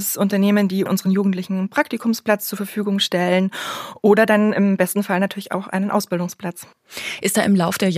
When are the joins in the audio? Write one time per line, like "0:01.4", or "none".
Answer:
none